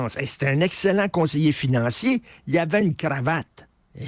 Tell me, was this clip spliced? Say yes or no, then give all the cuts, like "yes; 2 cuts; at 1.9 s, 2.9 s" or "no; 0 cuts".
no; 0 cuts